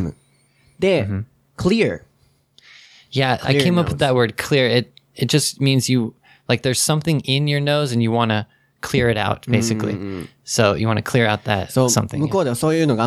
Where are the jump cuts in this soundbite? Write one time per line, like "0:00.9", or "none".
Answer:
none

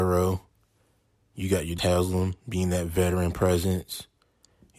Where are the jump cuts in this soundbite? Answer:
0:01.8

